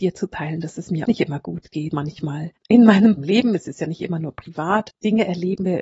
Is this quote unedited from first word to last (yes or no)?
no